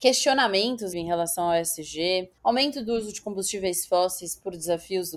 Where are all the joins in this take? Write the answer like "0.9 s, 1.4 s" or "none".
0.9 s, 2.4 s